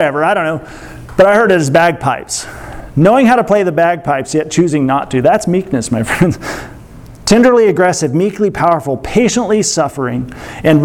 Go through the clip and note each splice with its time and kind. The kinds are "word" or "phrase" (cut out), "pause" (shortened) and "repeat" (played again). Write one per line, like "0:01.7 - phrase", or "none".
none